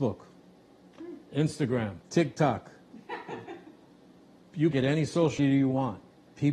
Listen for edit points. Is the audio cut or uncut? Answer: cut